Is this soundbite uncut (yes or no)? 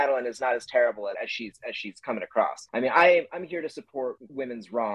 no